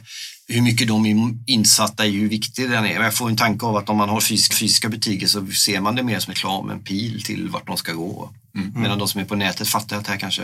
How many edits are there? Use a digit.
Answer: 2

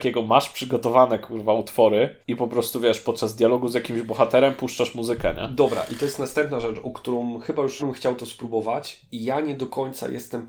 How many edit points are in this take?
2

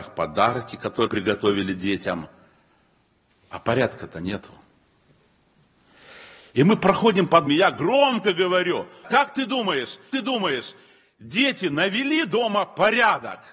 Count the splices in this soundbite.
4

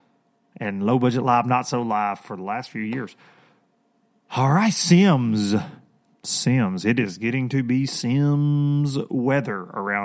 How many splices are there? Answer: 0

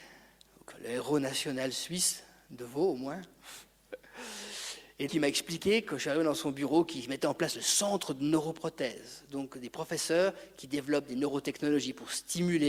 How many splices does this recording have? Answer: 1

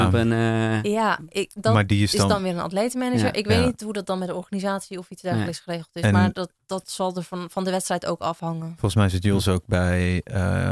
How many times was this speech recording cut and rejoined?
0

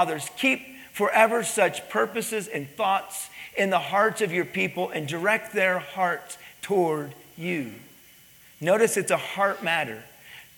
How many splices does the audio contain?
0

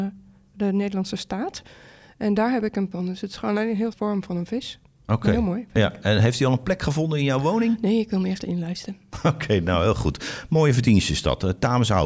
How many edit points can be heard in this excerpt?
3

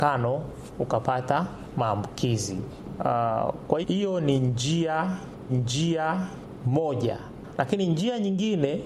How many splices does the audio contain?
2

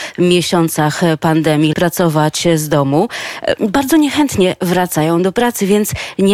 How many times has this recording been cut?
1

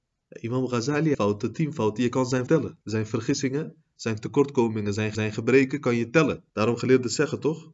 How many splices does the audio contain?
5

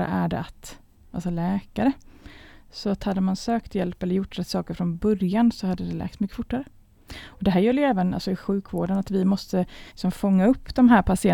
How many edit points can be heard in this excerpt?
1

